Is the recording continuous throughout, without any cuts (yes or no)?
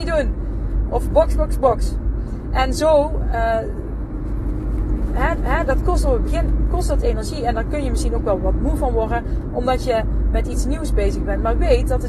no